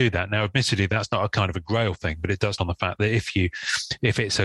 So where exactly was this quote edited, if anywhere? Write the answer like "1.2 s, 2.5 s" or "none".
2.6 s